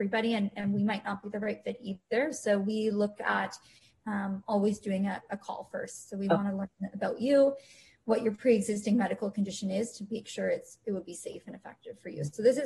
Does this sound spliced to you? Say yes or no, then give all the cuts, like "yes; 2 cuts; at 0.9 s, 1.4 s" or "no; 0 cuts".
no; 0 cuts